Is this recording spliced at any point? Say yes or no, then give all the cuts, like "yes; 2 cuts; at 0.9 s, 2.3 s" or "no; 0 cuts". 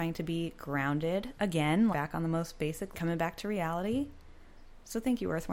yes; 2 cuts; at 1.9 s, 2.9 s